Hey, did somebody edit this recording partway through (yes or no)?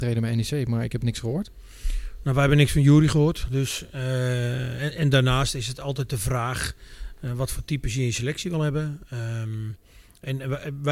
no